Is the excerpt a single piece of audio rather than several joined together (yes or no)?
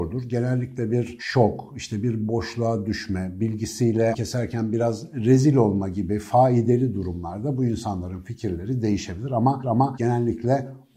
no